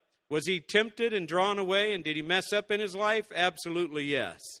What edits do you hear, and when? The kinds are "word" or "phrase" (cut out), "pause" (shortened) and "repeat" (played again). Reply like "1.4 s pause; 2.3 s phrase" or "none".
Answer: none